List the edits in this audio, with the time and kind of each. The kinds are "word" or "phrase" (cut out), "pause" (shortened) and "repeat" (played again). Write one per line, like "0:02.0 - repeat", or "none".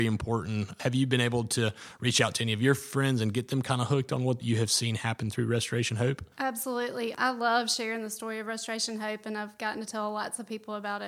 0:06.3 - pause